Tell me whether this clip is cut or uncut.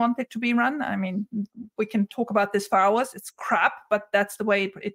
uncut